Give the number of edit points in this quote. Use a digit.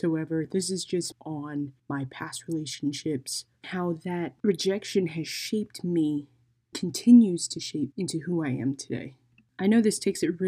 6